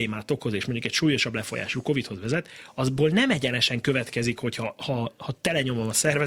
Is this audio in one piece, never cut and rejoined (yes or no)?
yes